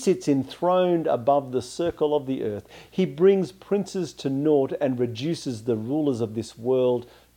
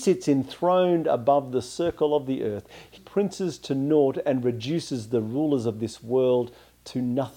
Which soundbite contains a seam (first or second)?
second